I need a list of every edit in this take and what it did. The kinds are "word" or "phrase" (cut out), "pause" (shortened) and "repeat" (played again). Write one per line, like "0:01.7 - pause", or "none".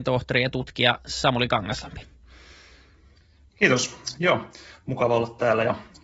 none